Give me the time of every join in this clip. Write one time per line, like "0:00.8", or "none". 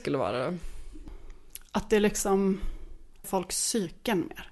0:03.2